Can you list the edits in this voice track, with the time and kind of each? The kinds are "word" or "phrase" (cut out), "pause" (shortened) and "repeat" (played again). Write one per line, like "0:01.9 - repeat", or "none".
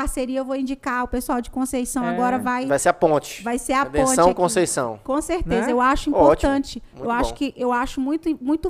none